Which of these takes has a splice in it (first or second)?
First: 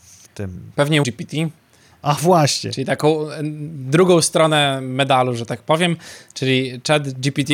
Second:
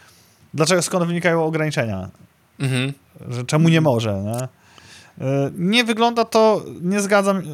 first